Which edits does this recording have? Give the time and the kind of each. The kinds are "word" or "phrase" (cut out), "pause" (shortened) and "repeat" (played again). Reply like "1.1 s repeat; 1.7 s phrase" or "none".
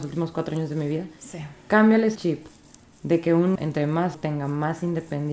2.2 s word; 3.6 s word; 4.1 s word